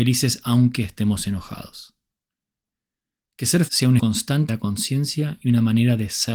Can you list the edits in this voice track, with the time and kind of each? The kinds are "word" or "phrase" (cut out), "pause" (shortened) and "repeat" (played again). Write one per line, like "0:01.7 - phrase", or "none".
0:03.7 - word
0:04.0 - word
0:04.5 - word

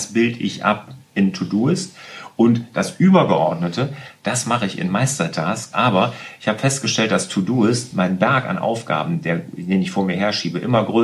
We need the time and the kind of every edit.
none

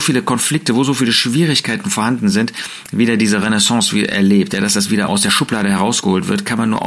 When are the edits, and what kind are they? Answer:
0:05.1 - word

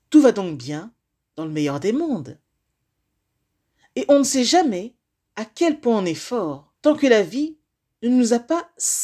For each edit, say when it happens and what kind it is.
0:06.8 - pause

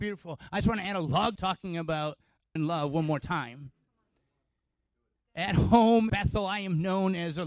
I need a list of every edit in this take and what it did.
0:01.4 - phrase
0:02.6 - word
0:06.1 - word

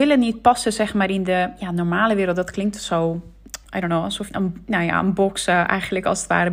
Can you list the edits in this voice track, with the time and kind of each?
0:03.6 - word
0:04.3 - word

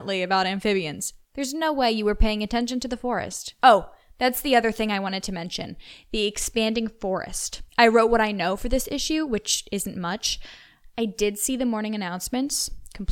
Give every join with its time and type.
0:01.2 - pause
0:03.6 - pause
0:07.7 - pause

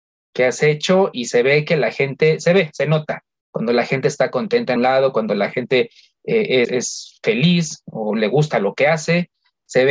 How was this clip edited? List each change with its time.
0:04.8 - word
0:06.6 - word

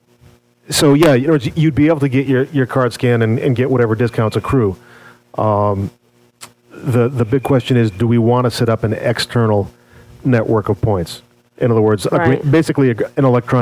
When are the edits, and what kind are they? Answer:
none

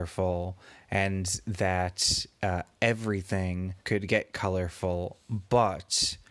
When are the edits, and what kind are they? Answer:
0:03.8 - pause

